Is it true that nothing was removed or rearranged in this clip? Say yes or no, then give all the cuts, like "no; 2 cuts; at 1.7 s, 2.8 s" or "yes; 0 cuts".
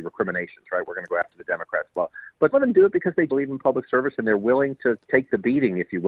no; 3 cuts; at 2.5 s, 3.3 s, 5.0 s